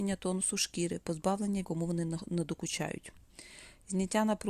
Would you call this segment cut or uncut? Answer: cut